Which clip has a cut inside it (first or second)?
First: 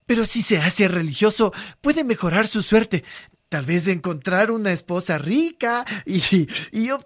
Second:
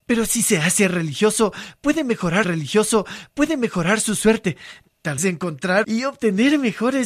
second